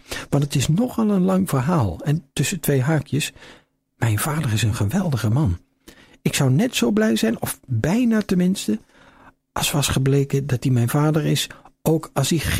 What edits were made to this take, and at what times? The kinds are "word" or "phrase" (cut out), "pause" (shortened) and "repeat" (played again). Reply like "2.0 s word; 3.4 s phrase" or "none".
none